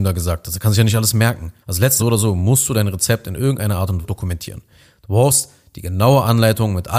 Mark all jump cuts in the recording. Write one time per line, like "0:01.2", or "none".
0:01.6
0:02.0
0:04.0